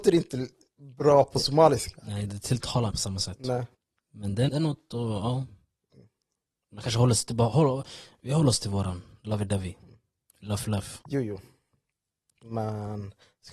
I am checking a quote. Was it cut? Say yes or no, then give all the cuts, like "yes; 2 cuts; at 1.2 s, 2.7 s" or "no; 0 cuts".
yes; 4 cuts; at 2.9 s, 3.7 s, 4.5 s, 11.0 s